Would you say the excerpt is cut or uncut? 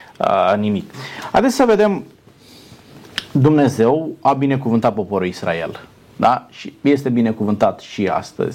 uncut